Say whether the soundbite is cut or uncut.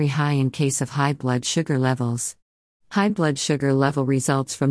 uncut